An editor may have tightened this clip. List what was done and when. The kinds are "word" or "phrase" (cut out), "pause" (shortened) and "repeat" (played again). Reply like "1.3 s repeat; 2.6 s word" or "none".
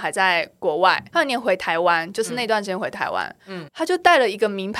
1.1 s word; 3.7 s phrase